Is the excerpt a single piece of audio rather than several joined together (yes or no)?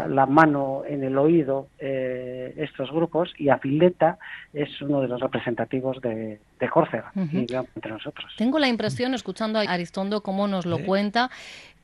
no